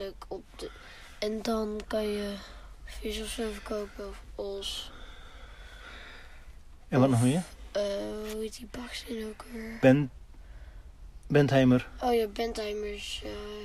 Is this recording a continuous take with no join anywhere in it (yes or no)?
yes